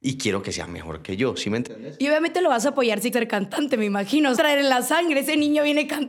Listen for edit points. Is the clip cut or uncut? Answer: cut